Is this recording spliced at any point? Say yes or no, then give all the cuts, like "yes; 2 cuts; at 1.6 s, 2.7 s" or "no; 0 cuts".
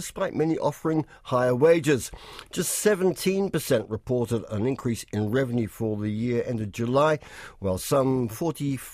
no; 0 cuts